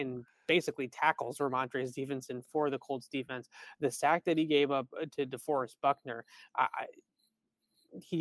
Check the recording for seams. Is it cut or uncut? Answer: uncut